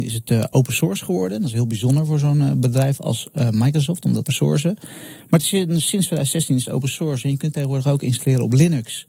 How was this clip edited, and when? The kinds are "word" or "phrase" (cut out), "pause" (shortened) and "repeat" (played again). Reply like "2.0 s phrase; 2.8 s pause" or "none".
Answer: 4.3 s word